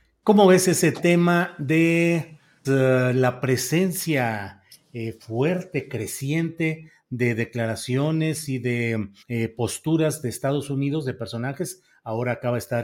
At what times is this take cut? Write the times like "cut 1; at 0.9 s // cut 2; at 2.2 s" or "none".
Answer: cut 1; at 2.6 s // cut 2; at 9.2 s